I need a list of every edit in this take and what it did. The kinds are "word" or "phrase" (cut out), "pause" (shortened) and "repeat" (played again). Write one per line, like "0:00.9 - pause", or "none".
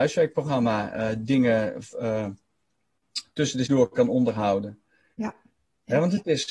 0:01.9 - word
0:03.7 - word